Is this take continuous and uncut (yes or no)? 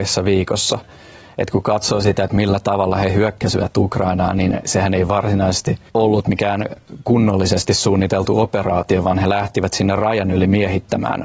no